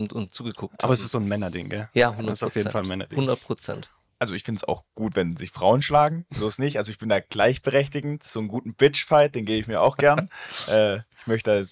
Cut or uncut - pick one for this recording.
uncut